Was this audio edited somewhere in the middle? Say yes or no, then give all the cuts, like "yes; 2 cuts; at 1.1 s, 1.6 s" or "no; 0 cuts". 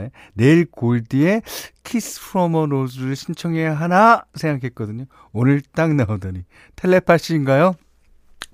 no; 0 cuts